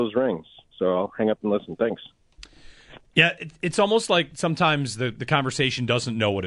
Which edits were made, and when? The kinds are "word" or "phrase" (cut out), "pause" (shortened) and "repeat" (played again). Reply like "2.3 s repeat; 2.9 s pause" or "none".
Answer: 3.1 s pause